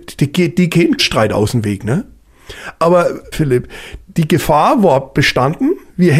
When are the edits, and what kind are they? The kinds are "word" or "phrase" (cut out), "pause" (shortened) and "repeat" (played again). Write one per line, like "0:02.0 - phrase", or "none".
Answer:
0:01.0 - word
0:03.3 - word
0:04.0 - word